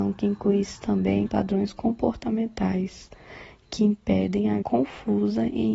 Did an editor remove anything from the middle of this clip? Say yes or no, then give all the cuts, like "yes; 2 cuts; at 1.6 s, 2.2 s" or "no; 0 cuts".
yes; 2 cuts; at 1.3 s, 4.6 s